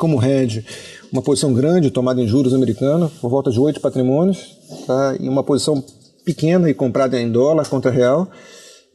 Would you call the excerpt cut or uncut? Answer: uncut